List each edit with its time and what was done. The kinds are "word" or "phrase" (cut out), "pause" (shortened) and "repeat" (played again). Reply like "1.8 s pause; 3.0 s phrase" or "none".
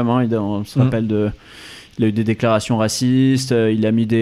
none